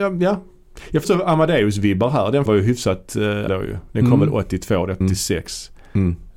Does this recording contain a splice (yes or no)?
yes